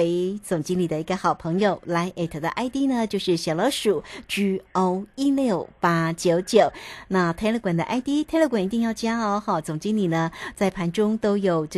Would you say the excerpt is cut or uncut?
uncut